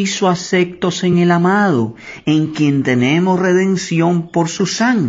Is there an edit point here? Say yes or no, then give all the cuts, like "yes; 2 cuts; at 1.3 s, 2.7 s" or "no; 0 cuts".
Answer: no; 0 cuts